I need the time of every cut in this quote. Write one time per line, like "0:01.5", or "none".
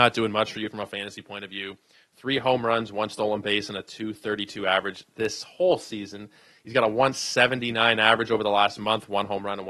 none

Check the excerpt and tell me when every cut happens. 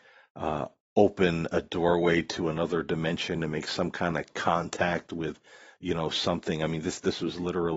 none

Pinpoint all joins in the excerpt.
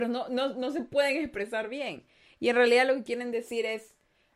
none

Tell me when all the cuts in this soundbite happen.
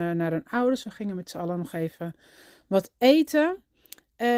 none

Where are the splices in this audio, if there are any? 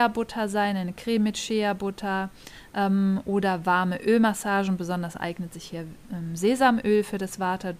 none

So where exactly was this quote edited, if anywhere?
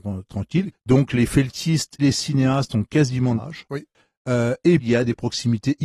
0:02.0
0:03.4
0:04.8

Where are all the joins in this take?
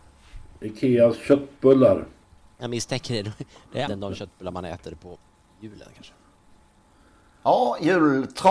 0:03.8

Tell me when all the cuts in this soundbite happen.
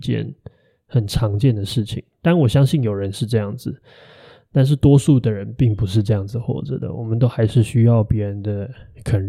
none

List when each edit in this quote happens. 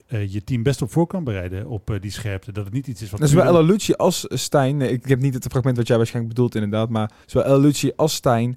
0:07.2

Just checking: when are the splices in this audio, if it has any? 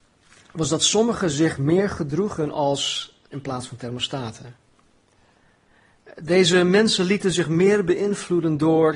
0:03.3

